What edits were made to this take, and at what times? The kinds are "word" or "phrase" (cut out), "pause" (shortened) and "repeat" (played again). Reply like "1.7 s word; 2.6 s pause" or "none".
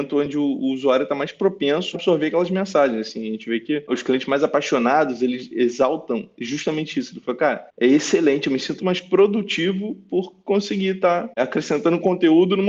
1.9 s word; 8.8 s word